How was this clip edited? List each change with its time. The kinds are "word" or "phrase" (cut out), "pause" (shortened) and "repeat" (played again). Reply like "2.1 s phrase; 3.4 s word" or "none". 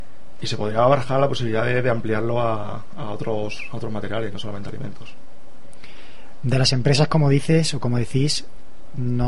none